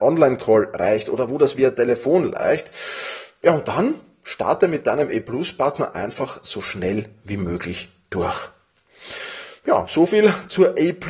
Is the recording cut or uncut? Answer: uncut